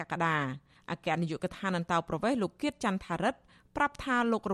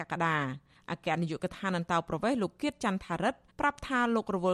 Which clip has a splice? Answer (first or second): second